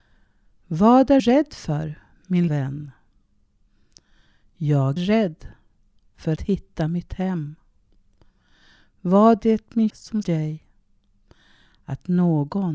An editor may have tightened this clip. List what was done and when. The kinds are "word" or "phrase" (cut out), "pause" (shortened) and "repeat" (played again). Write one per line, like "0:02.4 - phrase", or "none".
0:01.2 - word
0:02.5 - word
0:05.0 - word
0:06.4 - word
0:09.4 - word
0:09.9 - word
0:10.2 - word